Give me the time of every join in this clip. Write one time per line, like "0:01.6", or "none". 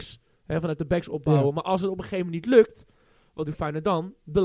none

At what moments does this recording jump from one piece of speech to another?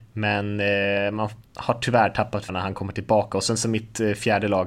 0:01.4
0:02.5

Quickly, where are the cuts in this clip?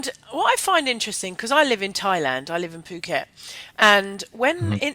none

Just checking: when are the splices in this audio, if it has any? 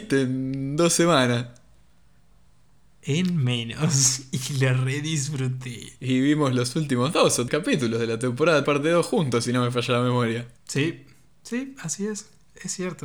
0:07.5
0:08.6
0:10.6

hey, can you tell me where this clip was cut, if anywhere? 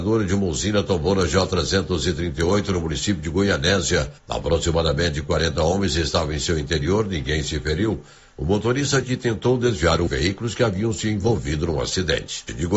0:04.2
0:09.0
0:10.1

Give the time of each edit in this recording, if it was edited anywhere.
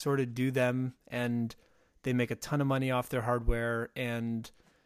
none

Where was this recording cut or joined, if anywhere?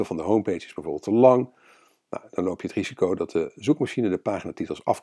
none

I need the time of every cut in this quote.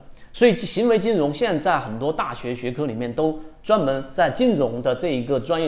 none

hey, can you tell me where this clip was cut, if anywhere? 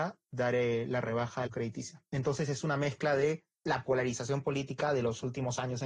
0:01.5
0:03.5

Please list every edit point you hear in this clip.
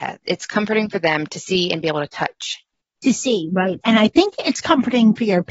none

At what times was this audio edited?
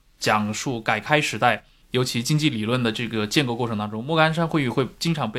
none

